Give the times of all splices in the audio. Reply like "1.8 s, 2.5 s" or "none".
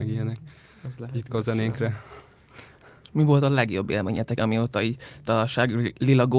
1.3 s, 4.4 s, 5.3 s